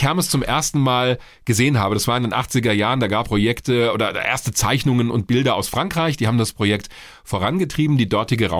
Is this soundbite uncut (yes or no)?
no